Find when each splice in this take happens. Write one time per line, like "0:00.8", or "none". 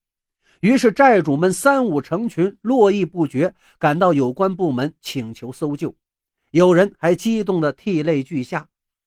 none